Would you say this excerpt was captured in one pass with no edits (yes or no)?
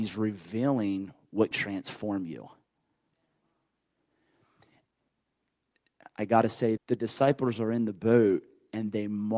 no